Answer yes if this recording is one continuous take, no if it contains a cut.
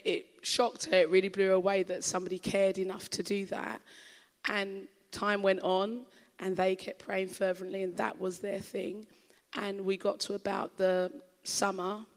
yes